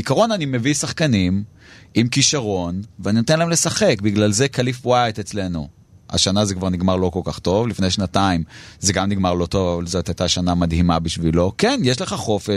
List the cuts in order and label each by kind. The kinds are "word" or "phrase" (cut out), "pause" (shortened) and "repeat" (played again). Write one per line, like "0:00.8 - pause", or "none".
none

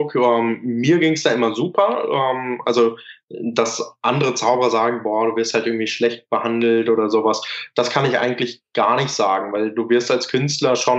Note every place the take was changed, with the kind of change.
none

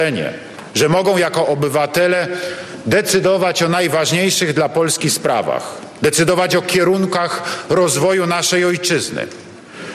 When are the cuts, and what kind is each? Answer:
none

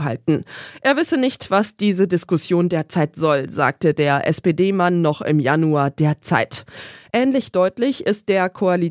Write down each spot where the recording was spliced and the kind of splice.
none

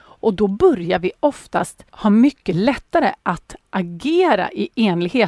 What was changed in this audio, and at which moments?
0:01.9 - pause

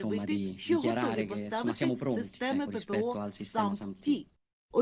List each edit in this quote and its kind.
none

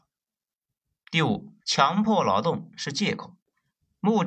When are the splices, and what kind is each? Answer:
0:01.6 - pause

